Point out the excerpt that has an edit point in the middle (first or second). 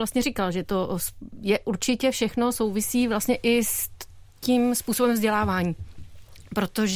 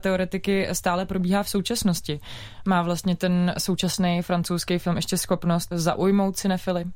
second